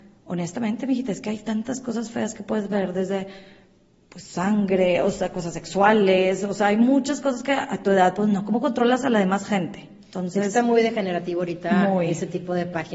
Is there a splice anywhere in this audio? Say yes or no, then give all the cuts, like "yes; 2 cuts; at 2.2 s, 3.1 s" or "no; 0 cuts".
no; 0 cuts